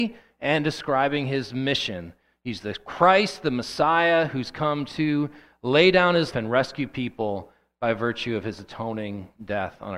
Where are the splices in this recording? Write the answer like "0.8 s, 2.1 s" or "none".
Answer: 6.3 s